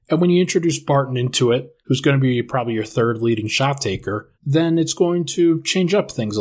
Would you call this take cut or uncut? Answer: cut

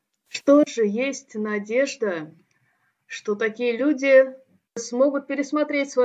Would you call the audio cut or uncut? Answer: uncut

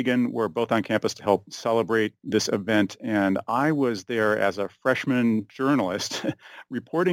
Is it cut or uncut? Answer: cut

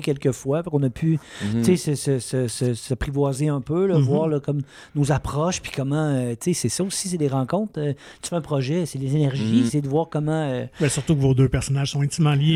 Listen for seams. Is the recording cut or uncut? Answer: cut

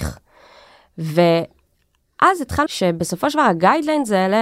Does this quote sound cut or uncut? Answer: cut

